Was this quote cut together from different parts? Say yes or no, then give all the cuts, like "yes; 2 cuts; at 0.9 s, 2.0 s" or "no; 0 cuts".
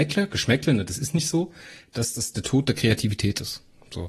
no; 0 cuts